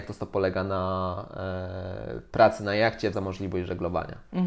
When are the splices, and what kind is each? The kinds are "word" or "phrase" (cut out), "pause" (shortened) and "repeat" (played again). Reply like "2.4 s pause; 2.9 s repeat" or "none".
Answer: 3.1 s word